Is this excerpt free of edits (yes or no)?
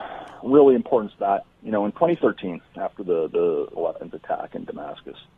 no